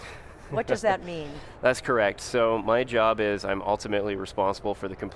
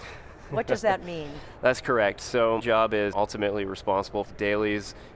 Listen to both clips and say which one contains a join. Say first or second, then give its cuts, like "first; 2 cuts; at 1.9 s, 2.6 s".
second; 3 cuts; at 2.6 s, 3.1 s, 4.2 s